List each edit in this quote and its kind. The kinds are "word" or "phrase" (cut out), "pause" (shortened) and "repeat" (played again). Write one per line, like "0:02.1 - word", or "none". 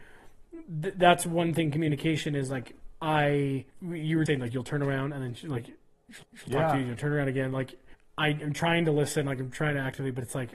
0:03.7 - pause
0:04.3 - word
0:06.2 - repeat
0:07.9 - pause

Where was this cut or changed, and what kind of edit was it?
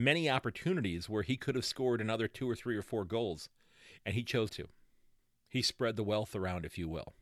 0:04.5 - word
0:05.2 - pause

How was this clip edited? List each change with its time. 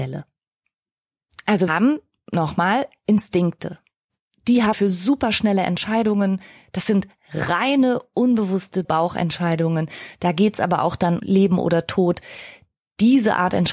0:01.7 - word
0:04.7 - word
0:08.8 - word
0:11.2 - word

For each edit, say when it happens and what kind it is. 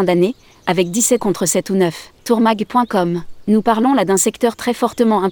0:01.2 - phrase
0:02.2 - pause

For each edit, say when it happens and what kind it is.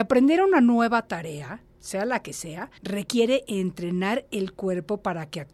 0:02.8 - pause

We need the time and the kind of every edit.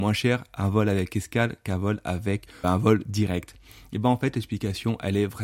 0:02.6 - word

